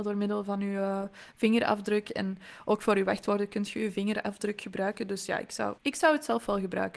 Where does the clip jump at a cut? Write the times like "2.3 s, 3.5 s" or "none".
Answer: 5.8 s

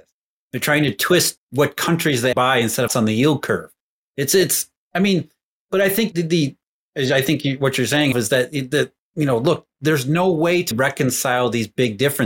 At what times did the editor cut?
1.4 s, 2.3 s, 2.9 s, 6.1 s, 8.1 s, 10.7 s

